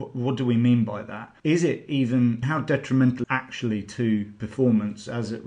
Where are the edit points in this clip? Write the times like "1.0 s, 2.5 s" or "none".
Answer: 1.4 s, 2.4 s, 3.2 s